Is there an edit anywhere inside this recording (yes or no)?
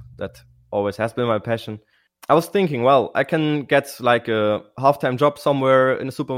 no